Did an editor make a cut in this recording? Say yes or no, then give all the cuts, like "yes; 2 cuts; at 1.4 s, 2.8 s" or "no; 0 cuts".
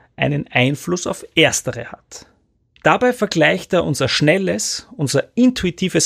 no; 0 cuts